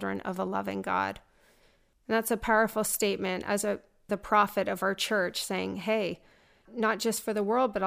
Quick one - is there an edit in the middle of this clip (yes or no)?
no